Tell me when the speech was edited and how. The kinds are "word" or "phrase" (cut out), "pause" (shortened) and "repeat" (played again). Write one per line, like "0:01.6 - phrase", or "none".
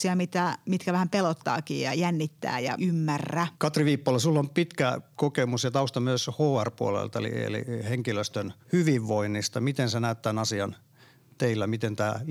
0:02.8 - phrase
0:03.5 - pause
0:05.1 - pause
0:08.6 - pause